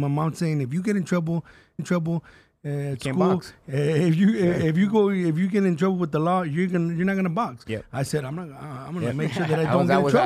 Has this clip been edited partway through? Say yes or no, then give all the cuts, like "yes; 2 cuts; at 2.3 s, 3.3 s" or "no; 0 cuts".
yes; 1 cut; at 1.8 s